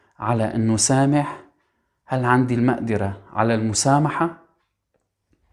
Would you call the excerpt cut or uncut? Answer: uncut